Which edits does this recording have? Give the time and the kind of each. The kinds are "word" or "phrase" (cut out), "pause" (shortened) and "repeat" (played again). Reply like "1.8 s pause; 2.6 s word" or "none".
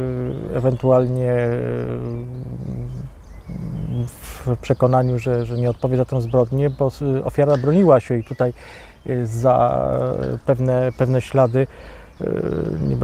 none